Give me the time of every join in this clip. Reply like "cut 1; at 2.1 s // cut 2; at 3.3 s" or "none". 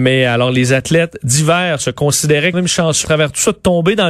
cut 1; at 2.5 s // cut 2; at 3.0 s